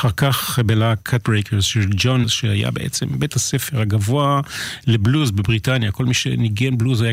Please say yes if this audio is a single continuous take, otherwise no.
no